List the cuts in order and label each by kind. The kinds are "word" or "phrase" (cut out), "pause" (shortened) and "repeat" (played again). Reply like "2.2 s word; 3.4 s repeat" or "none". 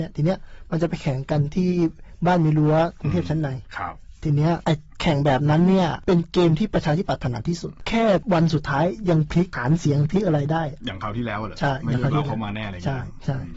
none